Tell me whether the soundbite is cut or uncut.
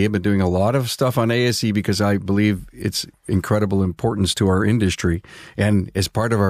uncut